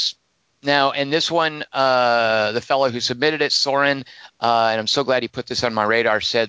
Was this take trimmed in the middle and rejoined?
no; 0 cuts

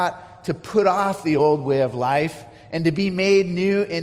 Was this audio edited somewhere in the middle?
no; 0 cuts

